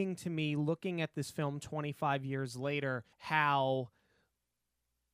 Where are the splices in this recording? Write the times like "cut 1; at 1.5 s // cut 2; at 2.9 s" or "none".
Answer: cut 1; at 3.1 s